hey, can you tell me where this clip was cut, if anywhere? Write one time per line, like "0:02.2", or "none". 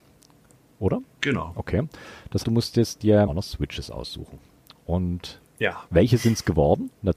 0:02.4
0:03.3
0:05.9